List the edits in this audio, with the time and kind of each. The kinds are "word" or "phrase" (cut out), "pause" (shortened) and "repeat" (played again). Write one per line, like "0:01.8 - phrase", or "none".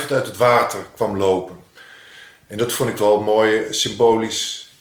none